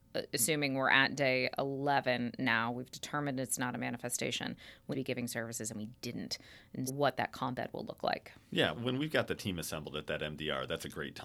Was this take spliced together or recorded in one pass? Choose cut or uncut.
cut